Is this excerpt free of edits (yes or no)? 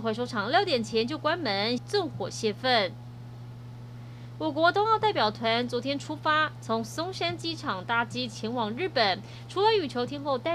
no